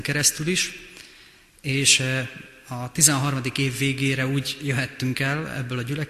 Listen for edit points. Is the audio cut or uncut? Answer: uncut